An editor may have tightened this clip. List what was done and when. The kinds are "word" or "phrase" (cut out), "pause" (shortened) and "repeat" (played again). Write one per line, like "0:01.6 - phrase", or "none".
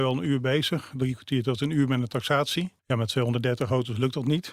0:02.8 - pause